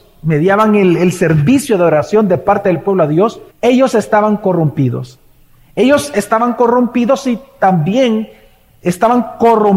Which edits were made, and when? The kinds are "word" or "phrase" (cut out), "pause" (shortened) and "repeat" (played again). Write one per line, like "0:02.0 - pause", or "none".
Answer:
0:03.5 - pause